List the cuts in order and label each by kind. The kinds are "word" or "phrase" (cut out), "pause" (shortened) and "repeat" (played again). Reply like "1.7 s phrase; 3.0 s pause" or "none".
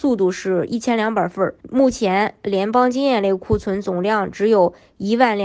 1.6 s pause